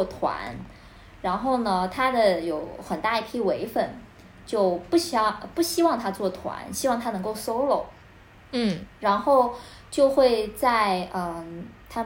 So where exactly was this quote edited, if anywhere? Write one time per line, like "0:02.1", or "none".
none